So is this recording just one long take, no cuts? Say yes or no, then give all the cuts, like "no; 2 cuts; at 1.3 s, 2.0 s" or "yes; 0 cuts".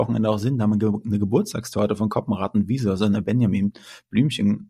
yes; 0 cuts